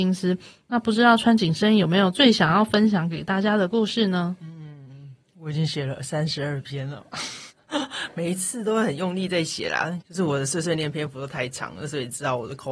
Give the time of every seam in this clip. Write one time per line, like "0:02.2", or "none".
0:07.5
0:10.0